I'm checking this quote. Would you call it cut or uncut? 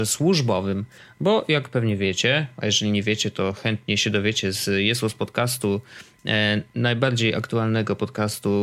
uncut